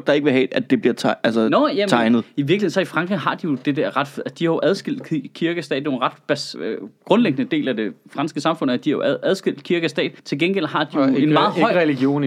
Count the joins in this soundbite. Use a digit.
2